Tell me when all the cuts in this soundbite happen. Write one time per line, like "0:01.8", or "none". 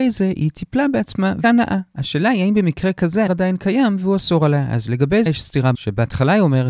0:01.4
0:03.3
0:05.3
0:05.7